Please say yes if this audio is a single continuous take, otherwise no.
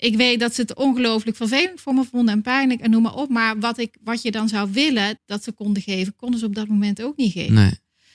no